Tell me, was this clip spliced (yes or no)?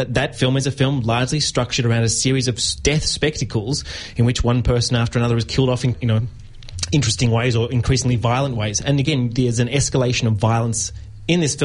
yes